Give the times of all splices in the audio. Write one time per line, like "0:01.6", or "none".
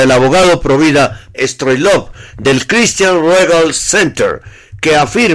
0:01.3